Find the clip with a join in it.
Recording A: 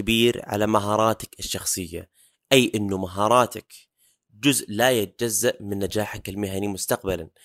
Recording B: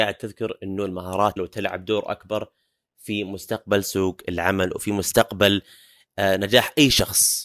B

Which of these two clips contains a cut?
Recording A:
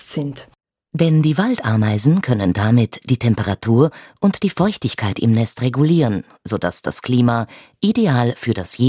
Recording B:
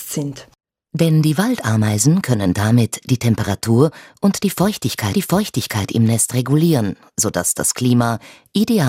B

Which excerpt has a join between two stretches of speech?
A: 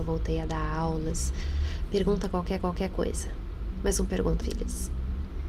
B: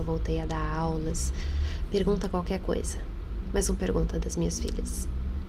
A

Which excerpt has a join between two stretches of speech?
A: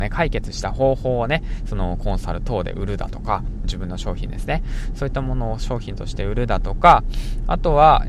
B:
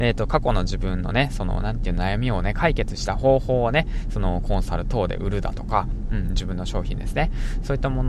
A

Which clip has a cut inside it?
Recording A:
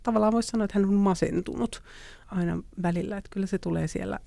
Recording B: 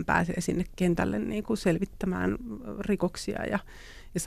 A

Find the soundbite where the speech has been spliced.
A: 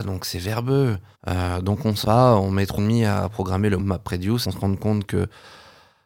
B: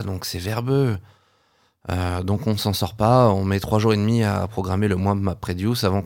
A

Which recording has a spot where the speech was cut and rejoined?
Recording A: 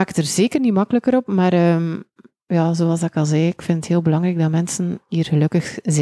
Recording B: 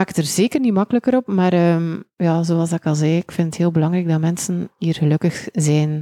B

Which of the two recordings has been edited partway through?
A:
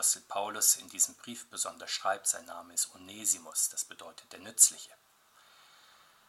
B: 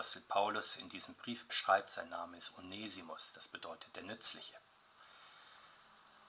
B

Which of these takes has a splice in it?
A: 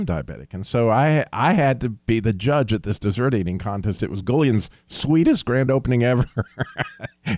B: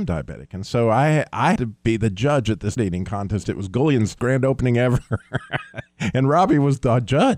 B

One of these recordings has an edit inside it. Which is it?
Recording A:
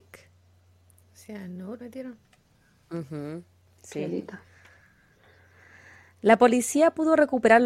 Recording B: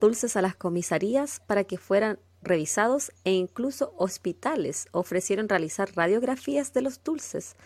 A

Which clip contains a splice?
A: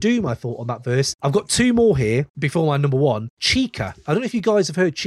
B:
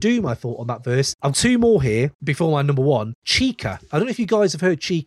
B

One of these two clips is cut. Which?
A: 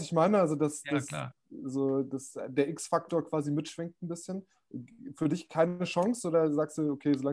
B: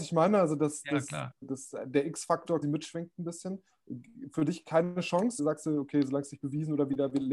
B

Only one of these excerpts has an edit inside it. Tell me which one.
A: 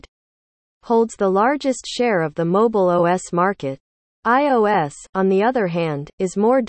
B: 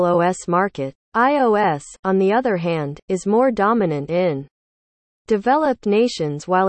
B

